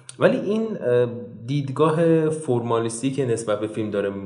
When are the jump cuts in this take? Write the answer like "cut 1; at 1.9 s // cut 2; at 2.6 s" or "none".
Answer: none